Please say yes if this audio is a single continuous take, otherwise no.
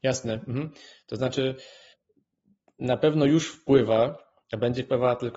yes